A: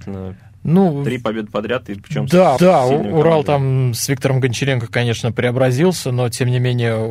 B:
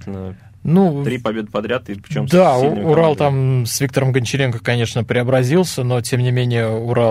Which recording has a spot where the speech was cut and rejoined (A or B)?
A